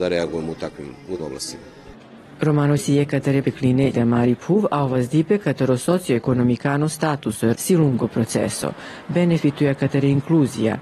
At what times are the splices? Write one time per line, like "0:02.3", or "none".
0:01.2
0:02.8
0:03.4
0:03.9
0:07.5